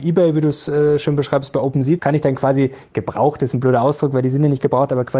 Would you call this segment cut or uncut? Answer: cut